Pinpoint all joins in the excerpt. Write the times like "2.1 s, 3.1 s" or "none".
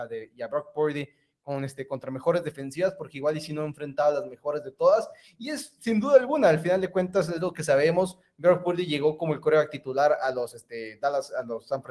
none